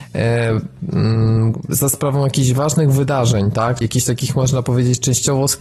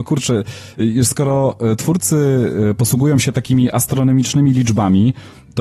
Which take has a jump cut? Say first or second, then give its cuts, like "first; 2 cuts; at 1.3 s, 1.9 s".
first; 1 cut; at 3.8 s